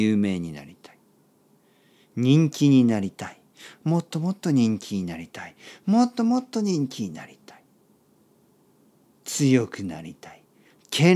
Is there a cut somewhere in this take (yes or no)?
no